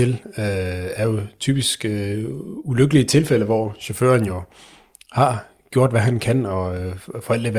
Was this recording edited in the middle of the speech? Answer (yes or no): no